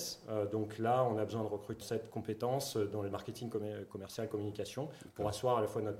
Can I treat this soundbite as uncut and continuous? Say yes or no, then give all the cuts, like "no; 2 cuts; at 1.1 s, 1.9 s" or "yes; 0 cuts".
no; 2 cuts; at 1.8 s, 3.1 s